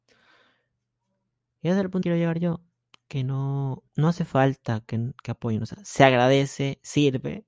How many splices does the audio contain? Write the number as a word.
two